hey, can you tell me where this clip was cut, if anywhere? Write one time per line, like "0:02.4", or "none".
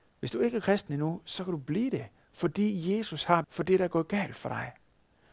0:03.4